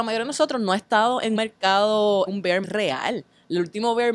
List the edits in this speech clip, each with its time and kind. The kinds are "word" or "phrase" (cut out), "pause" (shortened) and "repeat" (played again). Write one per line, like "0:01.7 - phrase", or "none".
0:01.4 - word
0:02.3 - word
0:02.6 - word